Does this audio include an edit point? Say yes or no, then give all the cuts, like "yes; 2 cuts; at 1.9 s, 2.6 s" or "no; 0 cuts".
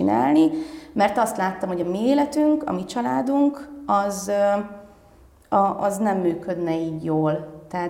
no; 0 cuts